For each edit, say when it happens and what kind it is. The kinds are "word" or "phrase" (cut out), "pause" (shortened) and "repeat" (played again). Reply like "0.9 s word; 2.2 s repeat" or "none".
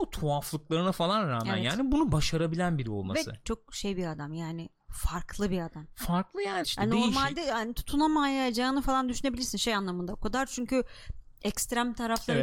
3.4 s word; 6.6 s word